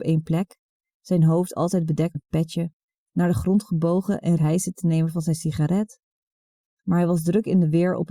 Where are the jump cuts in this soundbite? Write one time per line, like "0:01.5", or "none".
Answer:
0:02.1
0:04.4